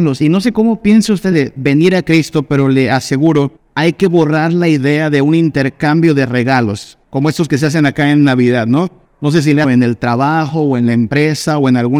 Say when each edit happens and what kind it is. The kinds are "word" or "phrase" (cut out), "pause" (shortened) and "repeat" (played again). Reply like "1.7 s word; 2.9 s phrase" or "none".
1.3 s word; 3.6 s pause; 7.0 s pause; 9.0 s pause; 9.6 s phrase

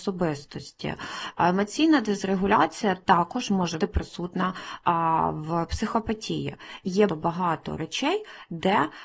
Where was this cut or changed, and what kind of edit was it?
3.8 s word; 7.1 s word

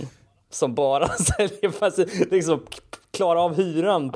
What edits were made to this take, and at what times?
none

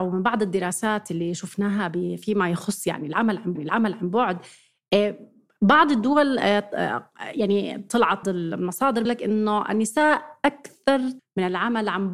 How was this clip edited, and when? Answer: 3.6 s repeat; 8.2 s word; 9.1 s word; 11.2 s phrase

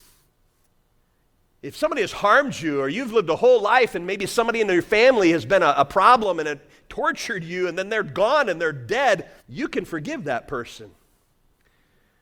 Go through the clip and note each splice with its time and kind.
9.4 s pause

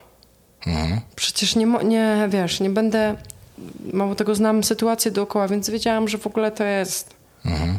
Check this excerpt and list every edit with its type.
none

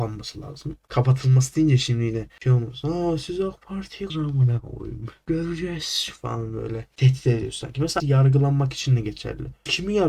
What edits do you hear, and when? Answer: 4.1 s word; 8.0 s word

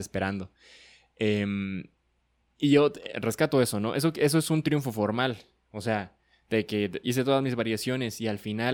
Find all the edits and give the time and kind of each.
7.0 s word

